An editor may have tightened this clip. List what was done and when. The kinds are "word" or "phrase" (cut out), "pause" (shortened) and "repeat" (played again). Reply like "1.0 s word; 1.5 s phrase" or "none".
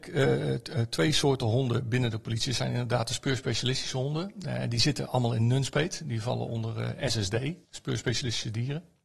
7.6 s pause